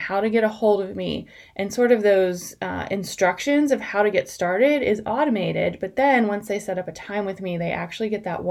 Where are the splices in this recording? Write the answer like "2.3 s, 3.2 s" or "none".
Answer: none